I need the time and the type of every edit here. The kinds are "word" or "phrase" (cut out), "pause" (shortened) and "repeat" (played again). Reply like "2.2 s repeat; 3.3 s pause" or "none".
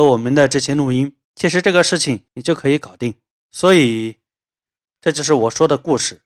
1.2 s pause; 2.3 s pause; 3.3 s pause